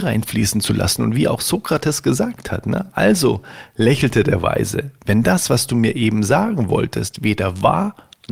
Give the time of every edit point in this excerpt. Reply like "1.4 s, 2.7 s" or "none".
none